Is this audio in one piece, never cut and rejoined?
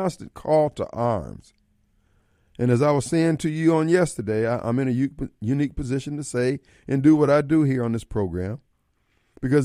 yes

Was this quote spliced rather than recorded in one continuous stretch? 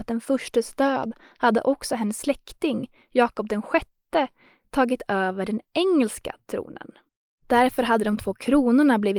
no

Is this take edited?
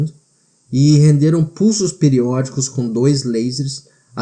no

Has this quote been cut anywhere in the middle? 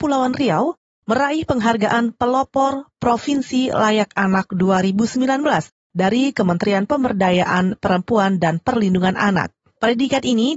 no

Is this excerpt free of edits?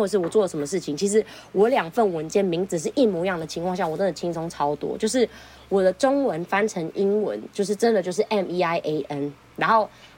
yes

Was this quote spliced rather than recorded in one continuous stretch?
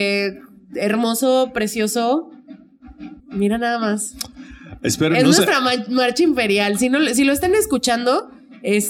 yes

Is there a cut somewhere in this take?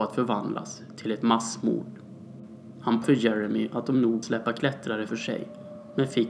yes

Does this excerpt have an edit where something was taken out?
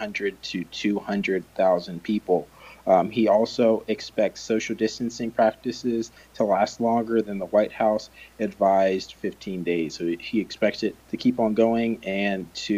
yes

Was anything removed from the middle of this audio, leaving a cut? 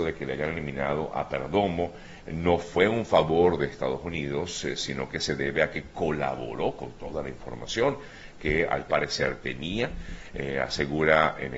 no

